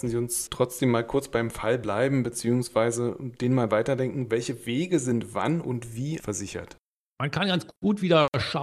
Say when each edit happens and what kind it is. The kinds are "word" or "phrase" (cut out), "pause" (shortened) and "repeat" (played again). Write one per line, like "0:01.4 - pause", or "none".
0:06.2 - word